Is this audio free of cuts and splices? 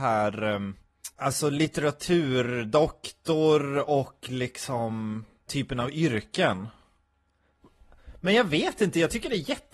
no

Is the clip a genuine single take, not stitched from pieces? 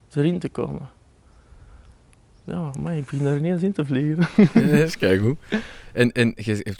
yes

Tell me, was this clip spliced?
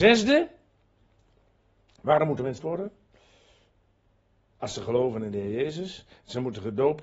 yes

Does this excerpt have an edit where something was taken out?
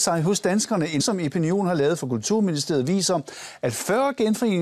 yes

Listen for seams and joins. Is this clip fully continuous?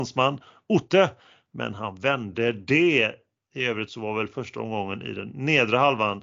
yes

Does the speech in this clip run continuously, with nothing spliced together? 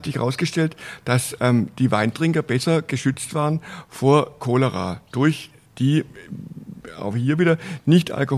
yes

